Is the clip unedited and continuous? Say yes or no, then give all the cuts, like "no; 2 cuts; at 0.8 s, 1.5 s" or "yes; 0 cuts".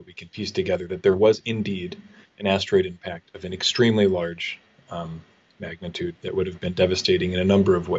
yes; 0 cuts